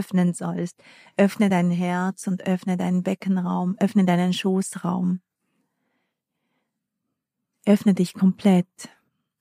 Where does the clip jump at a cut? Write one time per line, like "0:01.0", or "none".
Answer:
none